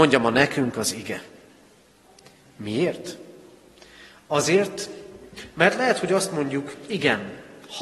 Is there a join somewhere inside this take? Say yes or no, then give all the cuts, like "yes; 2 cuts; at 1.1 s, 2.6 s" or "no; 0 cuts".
no; 0 cuts